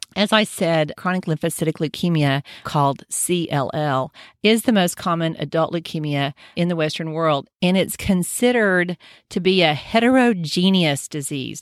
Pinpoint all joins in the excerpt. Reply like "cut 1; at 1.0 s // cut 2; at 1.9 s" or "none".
cut 1; at 1.0 s // cut 2; at 2.6 s // cut 3; at 6.5 s